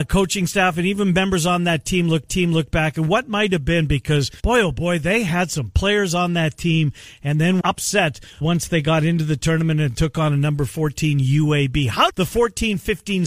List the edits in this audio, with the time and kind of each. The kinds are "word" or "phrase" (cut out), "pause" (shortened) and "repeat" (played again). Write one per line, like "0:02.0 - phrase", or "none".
0:02.3 - repeat
0:04.4 - pause
0:07.6 - word
0:08.4 - word
0:12.1 - phrase